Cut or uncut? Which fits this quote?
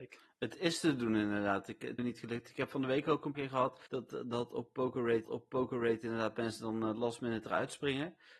cut